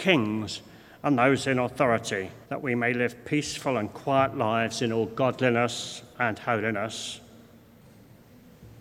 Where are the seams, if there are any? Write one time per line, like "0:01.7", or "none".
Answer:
0:02.4
0:06.1